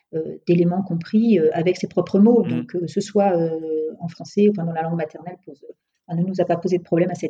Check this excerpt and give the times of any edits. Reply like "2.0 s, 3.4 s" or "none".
none